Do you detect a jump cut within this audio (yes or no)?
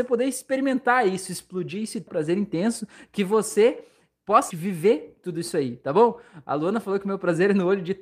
yes